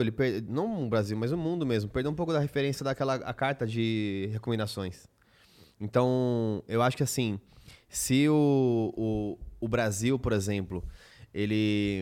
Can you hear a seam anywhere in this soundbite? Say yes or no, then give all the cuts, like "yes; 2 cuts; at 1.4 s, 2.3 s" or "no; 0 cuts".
no; 0 cuts